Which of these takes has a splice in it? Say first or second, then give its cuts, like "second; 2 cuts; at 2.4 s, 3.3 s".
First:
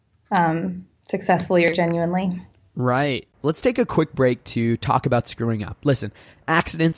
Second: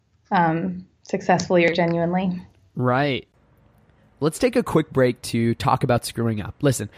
first; 1 cut; at 3.3 s